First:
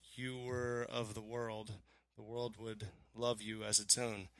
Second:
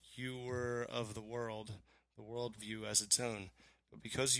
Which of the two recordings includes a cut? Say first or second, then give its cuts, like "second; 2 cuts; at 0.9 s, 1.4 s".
second; 1 cut; at 2.6 s